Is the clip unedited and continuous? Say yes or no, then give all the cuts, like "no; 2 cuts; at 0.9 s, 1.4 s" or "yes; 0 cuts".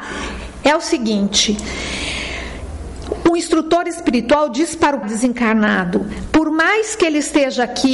no; 1 cut; at 5.0 s